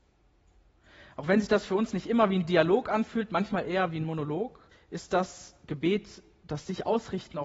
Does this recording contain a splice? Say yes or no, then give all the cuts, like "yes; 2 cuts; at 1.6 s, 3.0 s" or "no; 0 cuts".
yes; 1 cut; at 4.7 s